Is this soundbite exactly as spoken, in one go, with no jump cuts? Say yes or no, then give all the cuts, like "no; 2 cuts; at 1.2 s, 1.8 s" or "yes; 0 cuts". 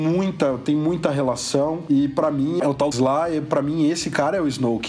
no; 1 cut; at 2.9 s